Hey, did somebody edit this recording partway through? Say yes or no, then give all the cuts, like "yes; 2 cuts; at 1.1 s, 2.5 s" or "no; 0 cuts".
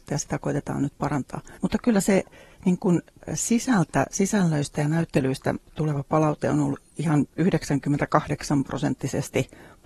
yes; 1 cut; at 1.6 s